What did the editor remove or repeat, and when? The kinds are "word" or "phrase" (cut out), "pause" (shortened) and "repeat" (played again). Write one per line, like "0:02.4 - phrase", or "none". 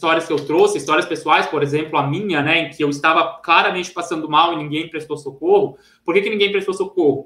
none

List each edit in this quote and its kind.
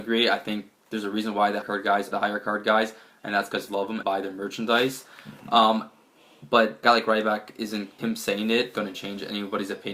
0:01.6 - word
0:02.1 - word
0:03.7 - word
0:04.0 - word
0:06.8 - word
0:08.0 - word
0:08.7 - word

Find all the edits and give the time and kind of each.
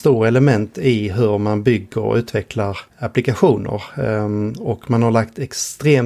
0:02.9 - pause

